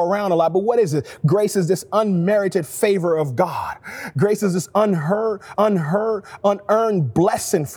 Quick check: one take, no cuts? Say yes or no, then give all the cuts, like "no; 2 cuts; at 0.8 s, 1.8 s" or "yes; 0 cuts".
no; 1 cut; at 5.5 s